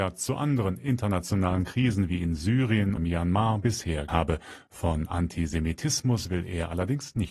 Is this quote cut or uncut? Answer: cut